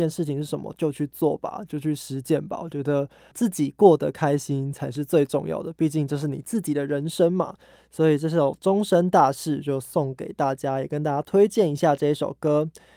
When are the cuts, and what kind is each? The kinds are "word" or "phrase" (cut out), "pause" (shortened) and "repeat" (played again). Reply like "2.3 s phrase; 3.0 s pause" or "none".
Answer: 3.3 s word